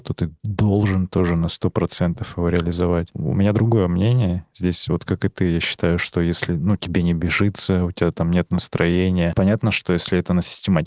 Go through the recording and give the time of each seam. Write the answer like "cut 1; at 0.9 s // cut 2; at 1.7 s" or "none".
none